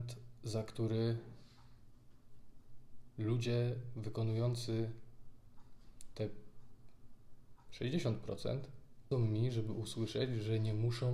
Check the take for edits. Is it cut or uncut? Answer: cut